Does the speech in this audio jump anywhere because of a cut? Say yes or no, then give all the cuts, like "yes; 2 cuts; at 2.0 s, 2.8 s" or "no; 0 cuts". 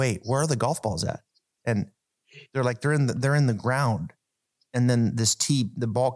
no; 0 cuts